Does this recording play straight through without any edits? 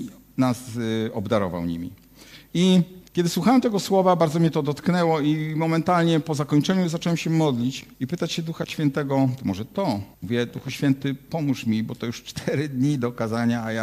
no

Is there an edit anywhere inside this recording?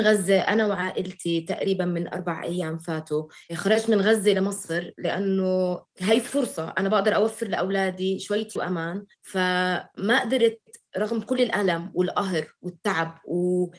yes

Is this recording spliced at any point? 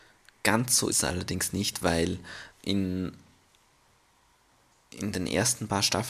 yes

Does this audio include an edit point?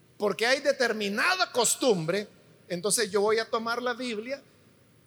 no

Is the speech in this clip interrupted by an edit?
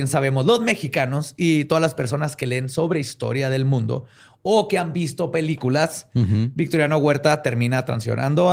no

